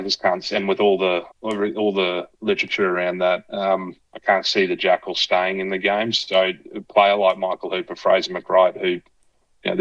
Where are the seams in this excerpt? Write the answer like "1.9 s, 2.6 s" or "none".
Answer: 1.3 s, 4.0 s